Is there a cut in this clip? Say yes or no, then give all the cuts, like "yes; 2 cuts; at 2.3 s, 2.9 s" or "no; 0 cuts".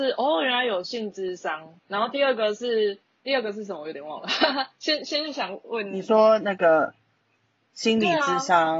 yes; 2 cuts; at 1.8 s, 3.2 s